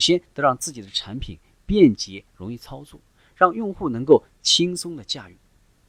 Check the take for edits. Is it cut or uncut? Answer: uncut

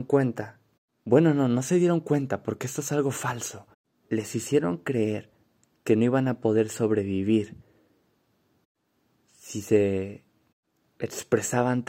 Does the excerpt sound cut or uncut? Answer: uncut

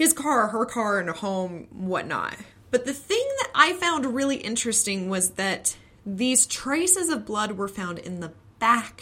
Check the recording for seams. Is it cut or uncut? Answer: uncut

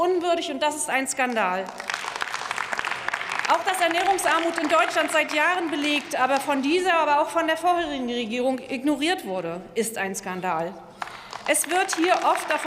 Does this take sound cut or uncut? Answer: uncut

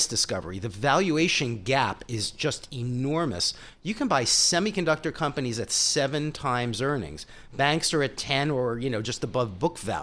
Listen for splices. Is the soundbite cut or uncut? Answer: uncut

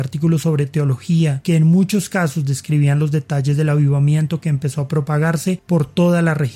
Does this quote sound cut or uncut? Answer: uncut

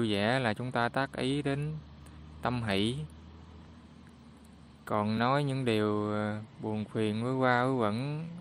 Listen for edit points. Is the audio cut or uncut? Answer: uncut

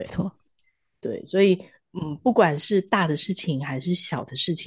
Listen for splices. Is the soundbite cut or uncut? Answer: uncut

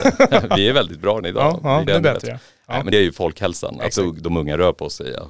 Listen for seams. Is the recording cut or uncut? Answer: cut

